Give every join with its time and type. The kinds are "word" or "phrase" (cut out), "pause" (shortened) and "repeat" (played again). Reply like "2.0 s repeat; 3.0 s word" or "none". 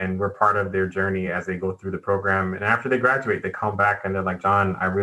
none